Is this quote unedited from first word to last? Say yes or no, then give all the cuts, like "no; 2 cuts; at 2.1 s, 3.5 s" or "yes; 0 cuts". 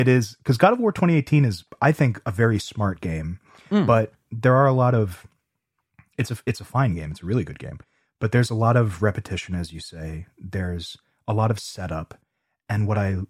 yes; 0 cuts